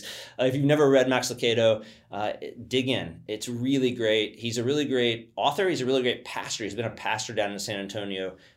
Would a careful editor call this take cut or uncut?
uncut